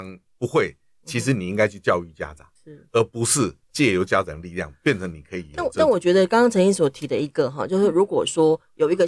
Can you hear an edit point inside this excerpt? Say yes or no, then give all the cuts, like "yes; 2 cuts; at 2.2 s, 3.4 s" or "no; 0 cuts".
yes; 2 cuts; at 2.6 s, 3.6 s